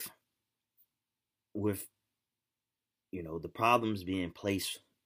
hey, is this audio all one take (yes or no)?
yes